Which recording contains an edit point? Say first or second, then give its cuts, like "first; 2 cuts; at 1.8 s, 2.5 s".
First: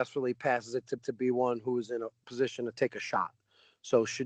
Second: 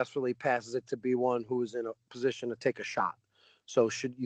first; 1 cut; at 1.0 s